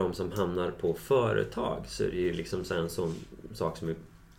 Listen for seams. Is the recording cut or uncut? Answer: uncut